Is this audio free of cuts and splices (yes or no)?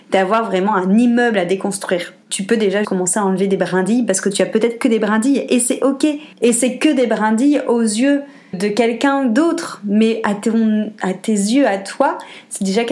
no